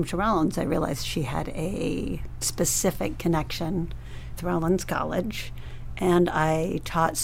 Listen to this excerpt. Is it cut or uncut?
cut